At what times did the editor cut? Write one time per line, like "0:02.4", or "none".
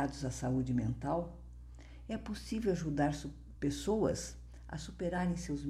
none